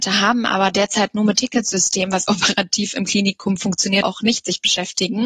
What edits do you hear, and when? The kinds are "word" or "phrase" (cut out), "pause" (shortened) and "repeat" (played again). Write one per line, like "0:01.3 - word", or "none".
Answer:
0:01.4 - word
0:02.3 - word
0:04.0 - word